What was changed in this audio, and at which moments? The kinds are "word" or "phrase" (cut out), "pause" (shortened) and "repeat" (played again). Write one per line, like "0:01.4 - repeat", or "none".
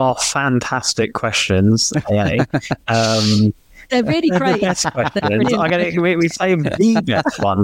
none